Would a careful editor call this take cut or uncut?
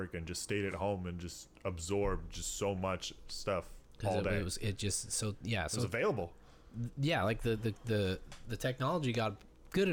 uncut